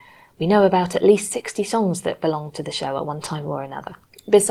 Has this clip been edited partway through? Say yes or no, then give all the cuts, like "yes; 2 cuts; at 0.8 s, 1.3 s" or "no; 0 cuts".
no; 0 cuts